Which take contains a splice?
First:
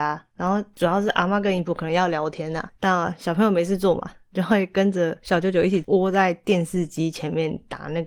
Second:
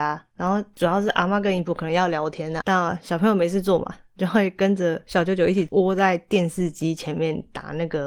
second; 1 cut; at 2.6 s

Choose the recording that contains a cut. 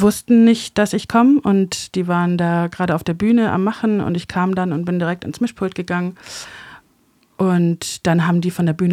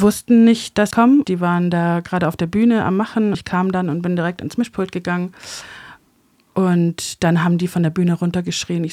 second; 3 cuts; at 0.9 s, 1.2 s, 3.3 s

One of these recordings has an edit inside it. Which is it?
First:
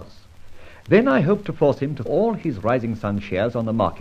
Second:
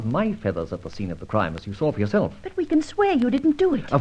first; 1 cut; at 2.1 s

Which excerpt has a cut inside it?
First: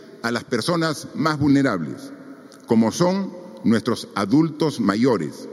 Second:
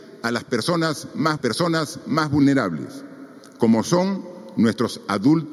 second; 1 cut; at 1.4 s

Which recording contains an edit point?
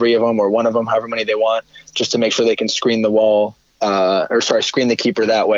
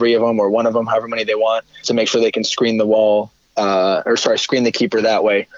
second; 1 cut; at 1.8 s

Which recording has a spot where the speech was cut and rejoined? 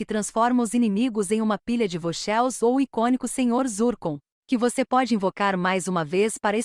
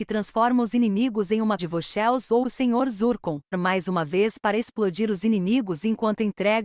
second; 3 cuts; at 1.6 s, 2.4 s, 3.5 s

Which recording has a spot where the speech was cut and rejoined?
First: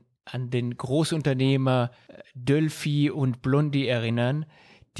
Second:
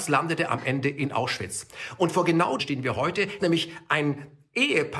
second; 2 cuts; at 2.6 s, 3.4 s

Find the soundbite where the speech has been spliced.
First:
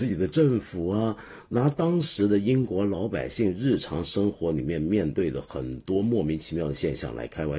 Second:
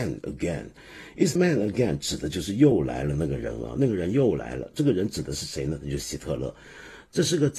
second; 1 cut; at 1.4 s

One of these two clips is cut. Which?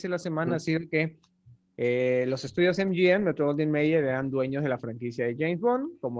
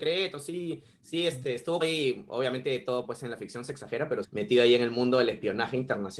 second; 2 cuts; at 1.8 s, 4.2 s

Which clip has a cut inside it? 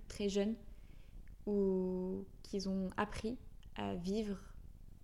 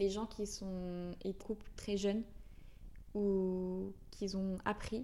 second; 1 cut; at 1.4 s

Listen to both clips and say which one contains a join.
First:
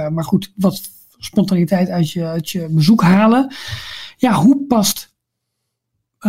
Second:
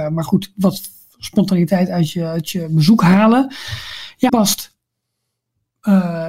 second; 1 cut; at 4.3 s

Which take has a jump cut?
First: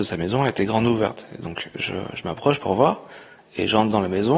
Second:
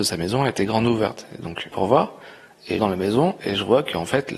second; 2 cuts; at 1.7 s, 2.8 s

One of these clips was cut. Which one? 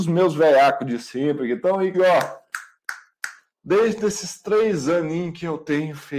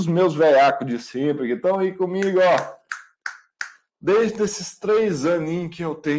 first; 1 cut; at 1.9 s

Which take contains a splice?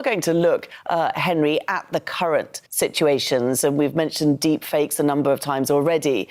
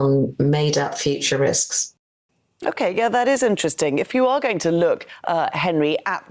first; 1 cut; at 2.7 s

